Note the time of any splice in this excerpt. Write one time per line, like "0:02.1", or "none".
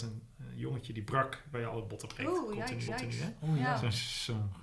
0:01.5
0:02.9

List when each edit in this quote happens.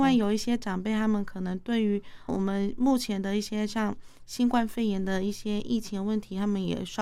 0:02.3

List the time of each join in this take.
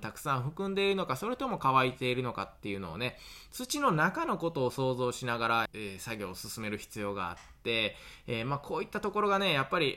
0:05.7

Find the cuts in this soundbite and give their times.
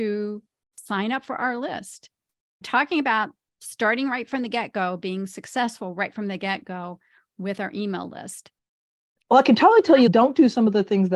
none

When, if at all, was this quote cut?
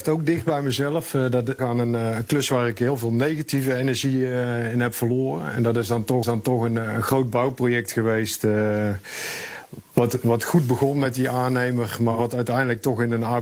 0:01.6
0:06.2

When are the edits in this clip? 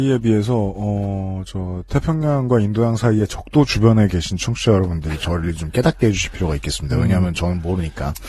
none

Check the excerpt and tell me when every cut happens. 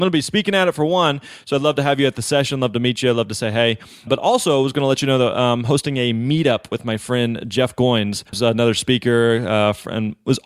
0:08.3

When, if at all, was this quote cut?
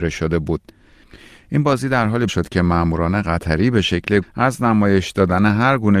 0:02.3
0:04.2

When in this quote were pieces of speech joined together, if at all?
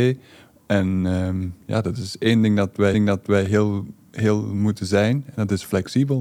0:02.9

